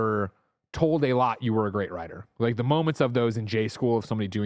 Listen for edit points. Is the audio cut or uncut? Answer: uncut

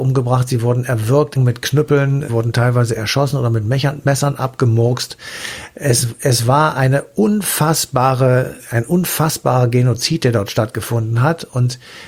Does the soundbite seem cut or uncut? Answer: cut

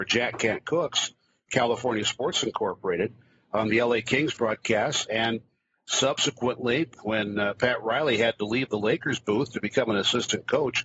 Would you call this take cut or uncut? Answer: uncut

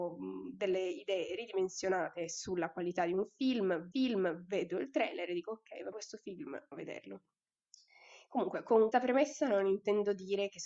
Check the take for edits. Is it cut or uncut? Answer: cut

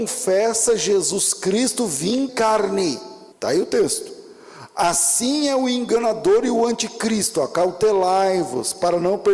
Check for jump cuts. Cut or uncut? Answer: cut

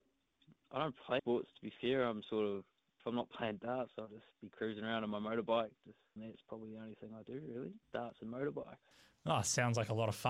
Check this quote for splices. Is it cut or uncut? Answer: cut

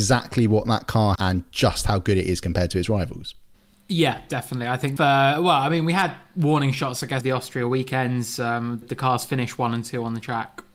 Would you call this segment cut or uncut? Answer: cut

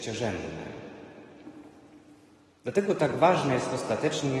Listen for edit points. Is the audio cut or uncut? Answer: uncut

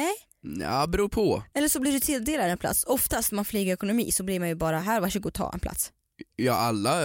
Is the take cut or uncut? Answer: uncut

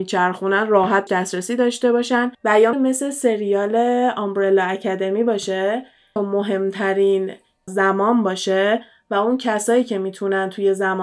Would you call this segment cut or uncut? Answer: cut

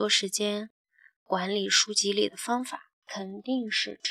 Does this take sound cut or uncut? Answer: uncut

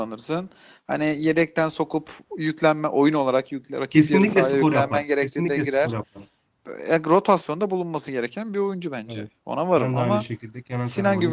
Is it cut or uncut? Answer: cut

